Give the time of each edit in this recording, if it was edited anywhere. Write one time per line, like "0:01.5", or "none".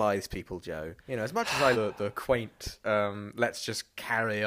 0:01.0
0:01.7
0:02.8